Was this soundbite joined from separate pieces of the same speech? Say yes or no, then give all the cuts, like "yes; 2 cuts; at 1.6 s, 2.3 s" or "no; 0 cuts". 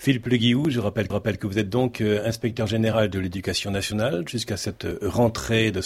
yes; 1 cut; at 1.1 s